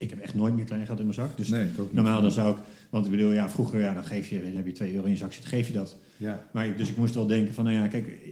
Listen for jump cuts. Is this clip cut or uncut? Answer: cut